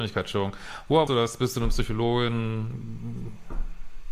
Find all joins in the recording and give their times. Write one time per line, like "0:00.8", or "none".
0:01.1